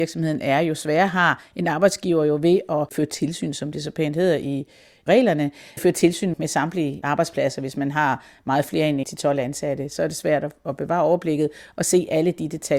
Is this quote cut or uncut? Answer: uncut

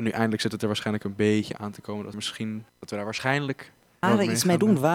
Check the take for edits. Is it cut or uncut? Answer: cut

